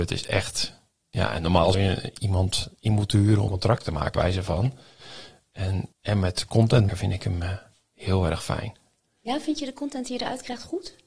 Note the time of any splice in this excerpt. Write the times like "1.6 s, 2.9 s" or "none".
1.7 s, 3.5 s, 4.1 s, 5.9 s, 6.9 s